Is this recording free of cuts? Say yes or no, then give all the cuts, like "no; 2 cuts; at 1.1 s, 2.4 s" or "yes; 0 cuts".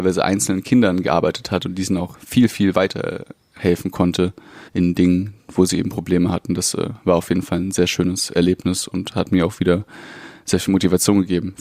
no; 1 cut; at 4.7 s